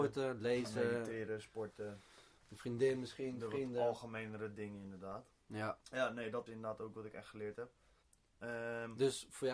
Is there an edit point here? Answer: yes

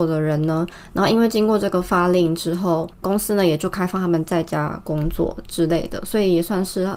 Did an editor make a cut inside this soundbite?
yes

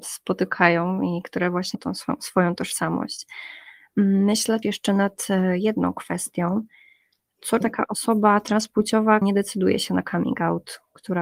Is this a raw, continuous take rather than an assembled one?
no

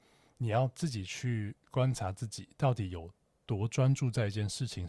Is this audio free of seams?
yes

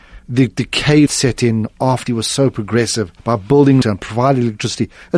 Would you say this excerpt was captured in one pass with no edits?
no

